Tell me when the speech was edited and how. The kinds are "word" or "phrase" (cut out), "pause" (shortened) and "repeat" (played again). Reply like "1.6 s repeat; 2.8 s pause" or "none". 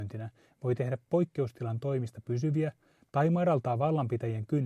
none

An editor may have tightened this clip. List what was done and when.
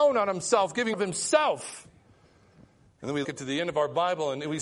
0.9 s word; 3.2 s word

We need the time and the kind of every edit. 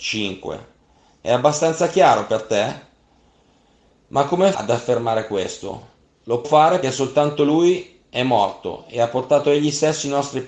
4.5 s word; 6.4 s word; 6.8 s word

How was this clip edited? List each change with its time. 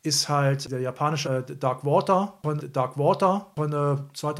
1.2 s word; 2.6 s repeat

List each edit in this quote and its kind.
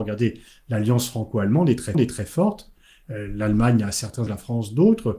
1.9 s repeat; 4.3 s word

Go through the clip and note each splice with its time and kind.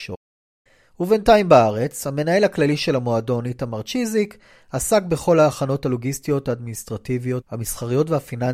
none

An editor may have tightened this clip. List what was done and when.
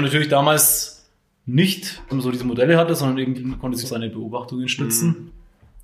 2.1 s word; 3.3 s word; 3.8 s word

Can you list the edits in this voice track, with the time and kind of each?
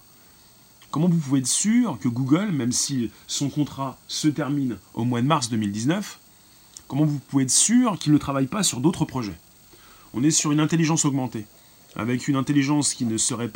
none

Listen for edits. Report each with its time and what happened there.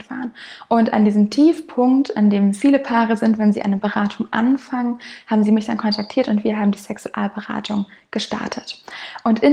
none

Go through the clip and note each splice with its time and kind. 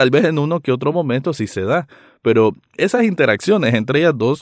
none

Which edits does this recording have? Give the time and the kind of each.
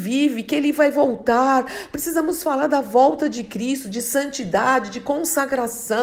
none

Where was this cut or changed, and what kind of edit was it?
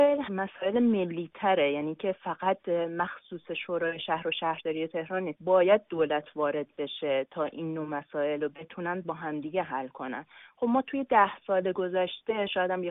none

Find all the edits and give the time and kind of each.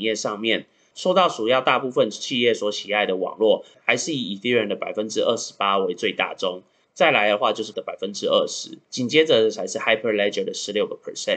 7.7 s word; 8.8 s pause

